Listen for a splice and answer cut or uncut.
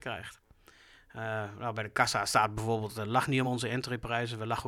uncut